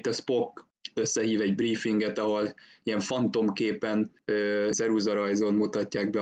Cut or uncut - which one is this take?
cut